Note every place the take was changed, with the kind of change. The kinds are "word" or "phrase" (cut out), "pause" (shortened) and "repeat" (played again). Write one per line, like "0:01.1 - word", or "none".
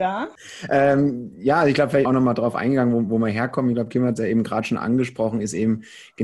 0:02.0 - word